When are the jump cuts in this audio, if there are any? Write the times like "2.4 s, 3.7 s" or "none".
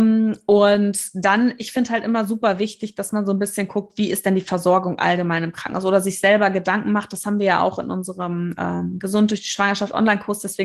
none